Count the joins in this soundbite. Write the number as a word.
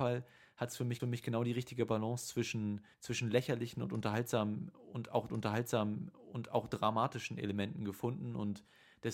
three